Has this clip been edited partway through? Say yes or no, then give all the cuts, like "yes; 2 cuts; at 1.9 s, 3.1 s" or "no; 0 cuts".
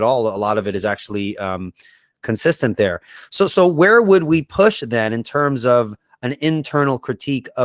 no; 0 cuts